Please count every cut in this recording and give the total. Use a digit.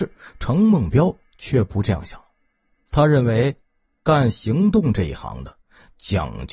0